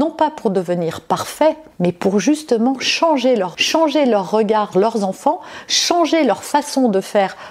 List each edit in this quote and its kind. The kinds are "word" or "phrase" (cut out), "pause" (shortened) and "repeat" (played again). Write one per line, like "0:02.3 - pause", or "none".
0:01.7 - pause
0:03.5 - phrase
0:04.7 - word